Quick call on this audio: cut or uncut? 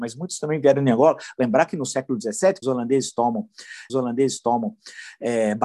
cut